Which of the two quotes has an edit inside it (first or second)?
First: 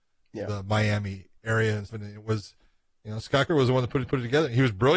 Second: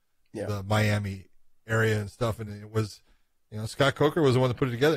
first